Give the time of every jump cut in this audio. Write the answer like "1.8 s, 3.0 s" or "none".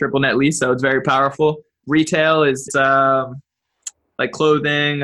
1.8 s, 2.7 s